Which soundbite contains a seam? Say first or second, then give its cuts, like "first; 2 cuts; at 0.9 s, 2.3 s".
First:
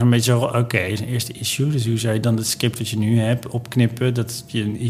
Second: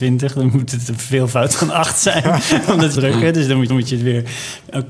second; 2 cuts; at 2.9 s, 3.7 s